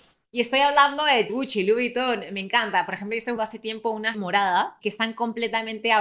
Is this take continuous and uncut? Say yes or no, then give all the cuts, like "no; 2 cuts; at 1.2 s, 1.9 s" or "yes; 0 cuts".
no; 3 cuts; at 1.3 s, 3.4 s, 4.1 s